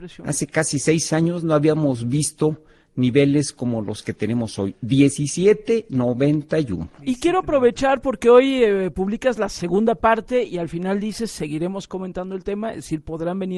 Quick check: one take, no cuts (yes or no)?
yes